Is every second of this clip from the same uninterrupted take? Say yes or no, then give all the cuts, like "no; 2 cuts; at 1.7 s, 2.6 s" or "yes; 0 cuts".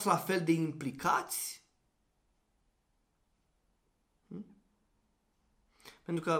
yes; 0 cuts